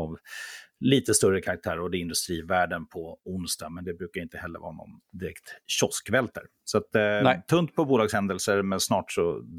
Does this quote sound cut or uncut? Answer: uncut